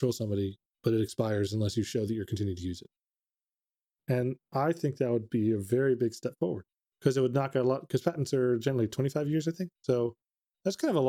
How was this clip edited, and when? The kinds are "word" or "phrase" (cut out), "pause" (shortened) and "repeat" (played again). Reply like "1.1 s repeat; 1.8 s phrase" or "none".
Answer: 6.7 s pause; 9.7 s pause